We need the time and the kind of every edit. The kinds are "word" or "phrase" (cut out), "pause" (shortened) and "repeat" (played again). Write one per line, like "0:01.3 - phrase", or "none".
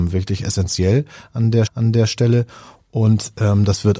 0:01.7 - repeat